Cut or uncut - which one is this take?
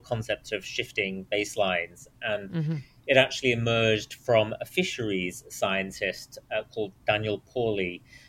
uncut